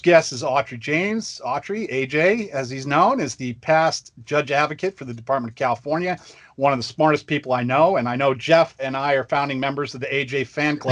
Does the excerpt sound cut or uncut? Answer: cut